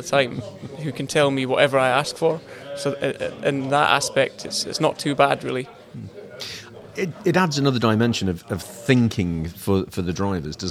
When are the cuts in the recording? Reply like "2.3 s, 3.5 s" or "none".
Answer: none